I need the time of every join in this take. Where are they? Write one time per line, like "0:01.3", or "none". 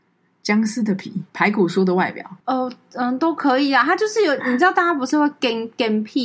0:01.3
0:02.4